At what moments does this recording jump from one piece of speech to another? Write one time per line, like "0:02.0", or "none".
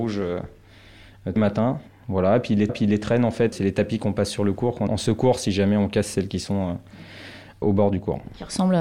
0:01.4
0:01.9
0:02.7
0:03.5
0:04.9
0:07.6